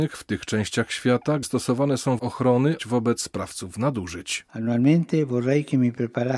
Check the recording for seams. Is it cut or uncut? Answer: cut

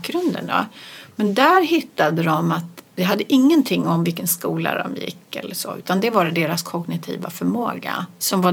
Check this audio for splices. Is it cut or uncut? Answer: cut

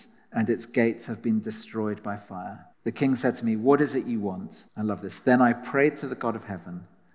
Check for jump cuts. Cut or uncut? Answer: cut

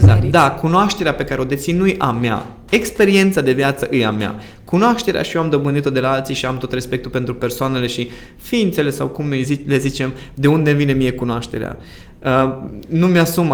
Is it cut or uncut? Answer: uncut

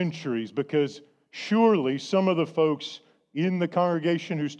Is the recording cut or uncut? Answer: uncut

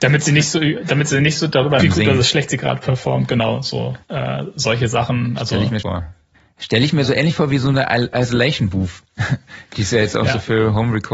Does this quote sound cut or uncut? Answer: cut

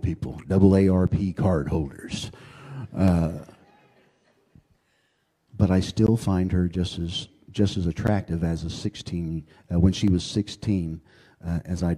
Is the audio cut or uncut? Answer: uncut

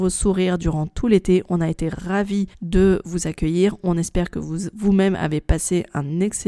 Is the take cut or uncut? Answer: cut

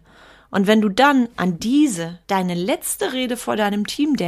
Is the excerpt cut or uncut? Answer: cut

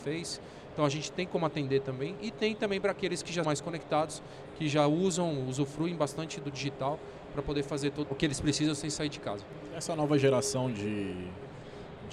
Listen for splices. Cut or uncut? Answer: cut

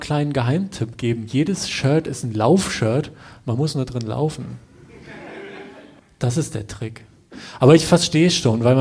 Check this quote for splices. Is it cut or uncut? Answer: cut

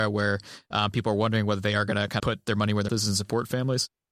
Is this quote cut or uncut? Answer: cut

